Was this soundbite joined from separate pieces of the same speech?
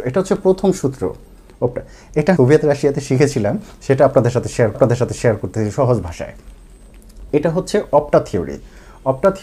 yes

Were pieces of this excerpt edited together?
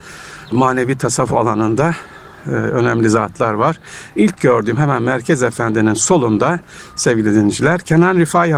no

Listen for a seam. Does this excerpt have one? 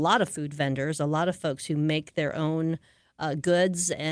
no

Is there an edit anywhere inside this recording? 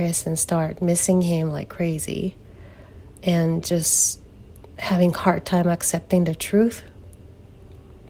no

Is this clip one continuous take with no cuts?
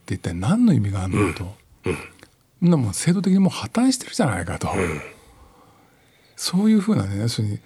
yes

